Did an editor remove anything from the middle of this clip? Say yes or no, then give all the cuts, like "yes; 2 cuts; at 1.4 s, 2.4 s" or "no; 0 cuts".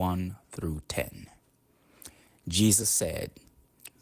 no; 0 cuts